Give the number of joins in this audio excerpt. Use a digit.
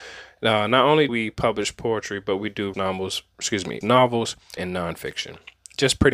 5